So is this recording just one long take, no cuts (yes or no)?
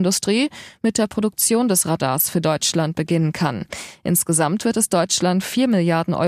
yes